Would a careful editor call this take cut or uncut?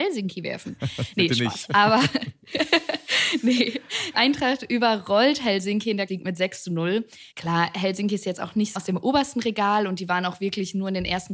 cut